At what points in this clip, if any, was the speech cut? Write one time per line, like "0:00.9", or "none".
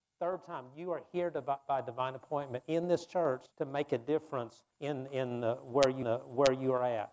0:03.5
0:04.7
0:06.0

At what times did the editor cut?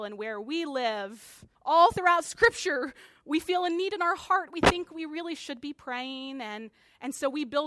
0:01.5

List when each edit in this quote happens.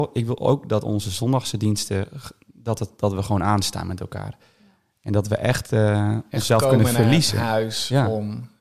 none

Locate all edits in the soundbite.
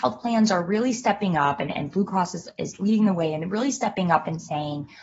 none

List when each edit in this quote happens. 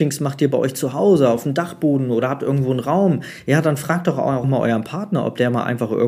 0:04.4

